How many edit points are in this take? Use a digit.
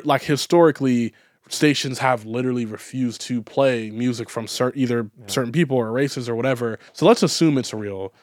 1